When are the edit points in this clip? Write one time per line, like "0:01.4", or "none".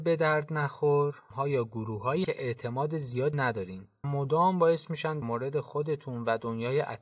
0:01.3
0:02.2
0:03.3
0:04.0
0:05.2